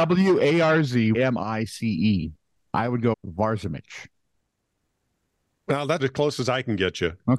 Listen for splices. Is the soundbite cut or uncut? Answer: cut